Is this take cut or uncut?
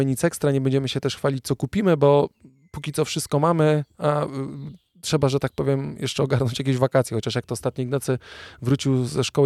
uncut